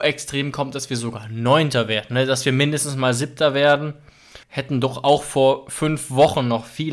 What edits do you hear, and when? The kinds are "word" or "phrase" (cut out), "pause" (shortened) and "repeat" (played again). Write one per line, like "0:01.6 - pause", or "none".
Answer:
0:04.4 - pause